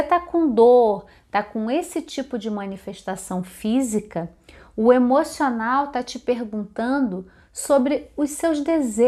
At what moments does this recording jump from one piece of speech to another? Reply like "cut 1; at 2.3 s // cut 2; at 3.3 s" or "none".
none